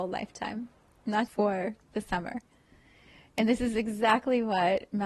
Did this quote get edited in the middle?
yes; 1 cut; at 1.3 s

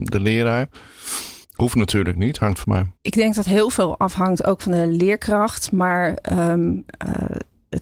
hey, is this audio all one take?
no; 3 cuts; at 1.4 s, 2.6 s, 3.0 s

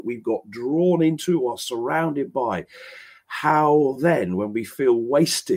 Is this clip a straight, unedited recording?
yes; 0 cuts

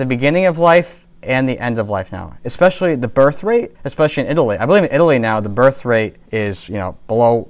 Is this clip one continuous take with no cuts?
no; 3 cuts; at 1.1 s, 3.7 s, 6.3 s

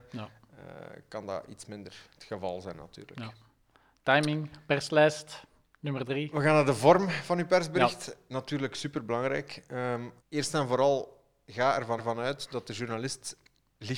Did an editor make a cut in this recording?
yes; 2 cuts; at 10.2 s, 12.0 s

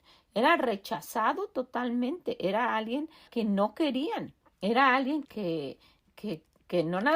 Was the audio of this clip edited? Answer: yes; 3 cuts; at 3.3 s, 4.5 s, 5.2 s

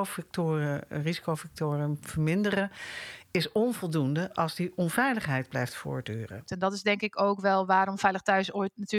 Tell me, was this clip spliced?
no; 0 cuts

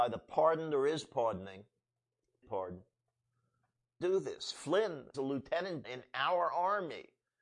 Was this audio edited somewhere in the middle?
yes; 4 cuts; at 2.4 s, 4.0 s, 5.1 s, 5.8 s

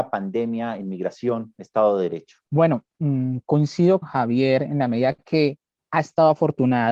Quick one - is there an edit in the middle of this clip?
yes; 2 cuts; at 2.4 s, 4.0 s

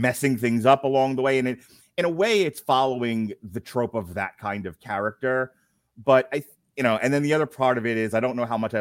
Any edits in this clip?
no; 0 cuts

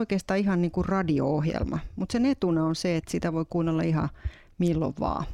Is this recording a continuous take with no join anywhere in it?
yes; 0 cuts

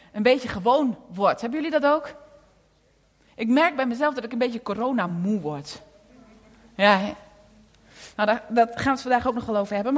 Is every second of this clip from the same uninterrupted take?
yes; 0 cuts

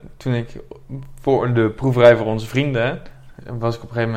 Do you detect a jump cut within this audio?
no; 0 cuts

